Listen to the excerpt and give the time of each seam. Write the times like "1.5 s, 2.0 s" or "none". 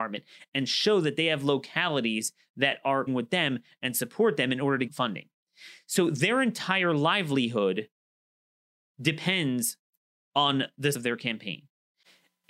3.1 s, 4.9 s, 10.9 s